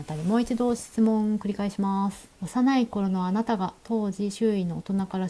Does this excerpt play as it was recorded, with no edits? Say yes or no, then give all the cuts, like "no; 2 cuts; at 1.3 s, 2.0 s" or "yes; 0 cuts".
no; 1 cut; at 2.3 s